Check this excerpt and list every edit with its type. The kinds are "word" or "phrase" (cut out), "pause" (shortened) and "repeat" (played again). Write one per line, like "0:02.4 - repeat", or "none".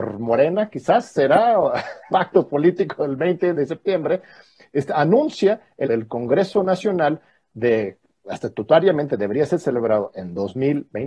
0:02.1 - word
0:03.5 - word
0:05.8 - word